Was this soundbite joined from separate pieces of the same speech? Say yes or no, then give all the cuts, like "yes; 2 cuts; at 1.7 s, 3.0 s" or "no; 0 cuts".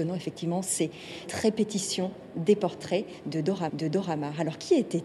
yes; 2 cuts; at 1.3 s, 3.7 s